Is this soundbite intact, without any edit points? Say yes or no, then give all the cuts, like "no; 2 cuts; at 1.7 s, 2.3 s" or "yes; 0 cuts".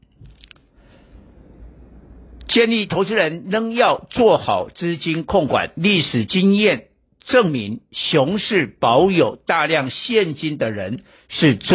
yes; 0 cuts